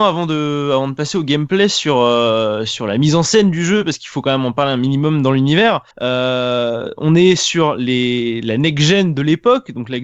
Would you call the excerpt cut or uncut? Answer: cut